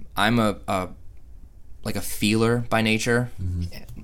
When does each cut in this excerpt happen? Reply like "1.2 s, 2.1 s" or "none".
none